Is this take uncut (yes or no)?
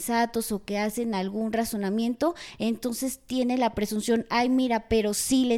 yes